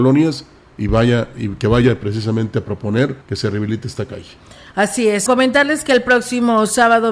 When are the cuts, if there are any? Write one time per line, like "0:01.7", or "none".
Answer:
0:03.2
0:05.3